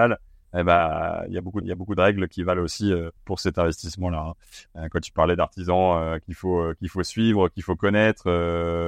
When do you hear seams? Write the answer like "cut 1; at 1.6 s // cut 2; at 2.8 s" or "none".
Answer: cut 1; at 1.6 s // cut 2; at 3.2 s